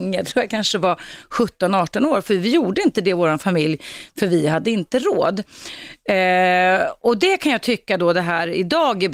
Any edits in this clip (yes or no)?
no